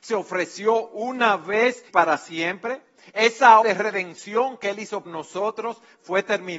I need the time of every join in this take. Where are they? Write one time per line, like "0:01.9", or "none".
0:01.9
0:03.6
0:05.0